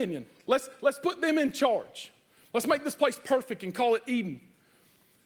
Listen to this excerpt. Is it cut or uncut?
uncut